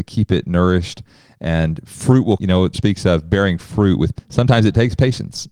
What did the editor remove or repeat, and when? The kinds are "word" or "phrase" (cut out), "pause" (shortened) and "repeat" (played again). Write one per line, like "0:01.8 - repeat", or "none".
0:02.4 - word
0:02.7 - word
0:04.2 - word